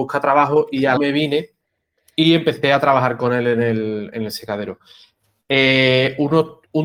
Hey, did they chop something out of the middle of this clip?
yes; 1 cut; at 1.0 s

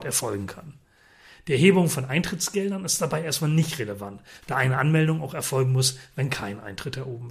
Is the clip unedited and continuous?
yes; 0 cuts

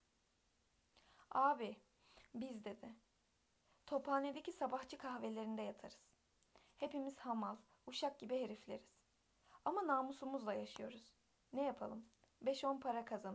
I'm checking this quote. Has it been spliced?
no; 0 cuts

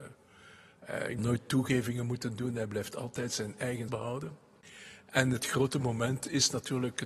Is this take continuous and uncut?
no; 2 cuts; at 1.2 s, 3.9 s

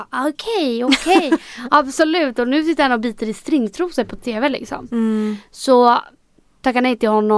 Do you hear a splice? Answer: no; 0 cuts

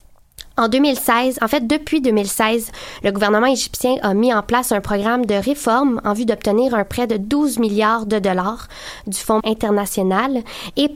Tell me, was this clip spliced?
yes; 1 cut; at 9.4 s

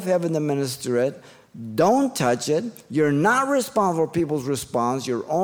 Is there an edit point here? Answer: no; 0 cuts

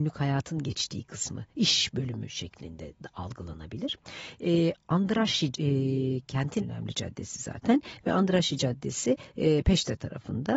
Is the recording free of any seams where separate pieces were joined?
no; 2 cuts; at 5.5 s, 6.6 s

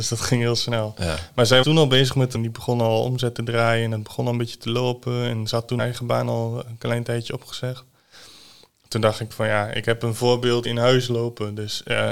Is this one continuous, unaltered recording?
no; 4 cuts; at 1.6 s, 2.3 s, 5.8 s, 10.6 s

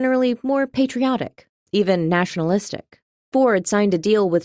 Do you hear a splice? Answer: yes; 1 cut; at 3.1 s

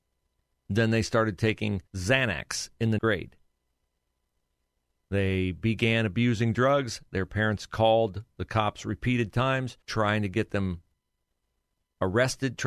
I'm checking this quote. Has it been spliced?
yes; 3 cuts; at 1.9 s, 3.0 s, 9.8 s

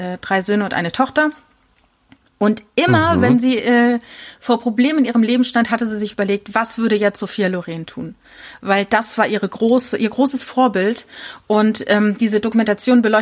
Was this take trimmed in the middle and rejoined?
no; 0 cuts

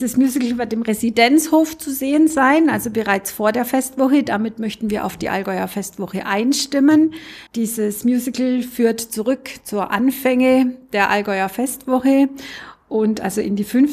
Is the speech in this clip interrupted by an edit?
yes; 1 cut; at 7.5 s

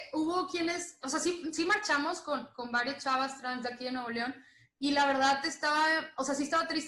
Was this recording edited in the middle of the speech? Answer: no; 0 cuts

